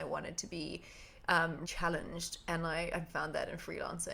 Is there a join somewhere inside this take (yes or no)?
yes